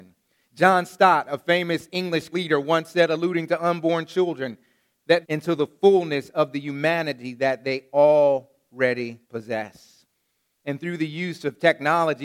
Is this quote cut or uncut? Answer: cut